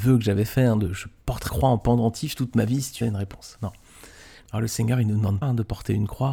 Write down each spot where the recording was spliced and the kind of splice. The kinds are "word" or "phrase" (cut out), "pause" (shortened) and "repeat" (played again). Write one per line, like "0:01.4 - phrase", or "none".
0:01.5 - word
0:03.0 - word
0:05.4 - word